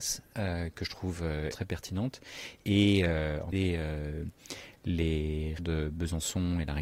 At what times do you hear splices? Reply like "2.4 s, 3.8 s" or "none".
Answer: 1.5 s, 3.5 s, 5.6 s

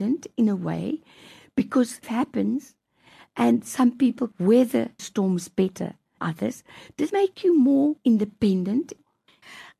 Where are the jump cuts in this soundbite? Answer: 2.0 s, 3.6 s, 4.3 s, 5.0 s, 6.2 s, 7.1 s

